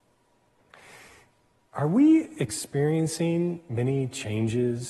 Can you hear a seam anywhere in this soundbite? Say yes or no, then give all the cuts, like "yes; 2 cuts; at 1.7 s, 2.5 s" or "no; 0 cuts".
no; 0 cuts